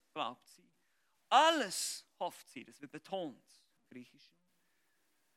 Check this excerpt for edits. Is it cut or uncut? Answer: uncut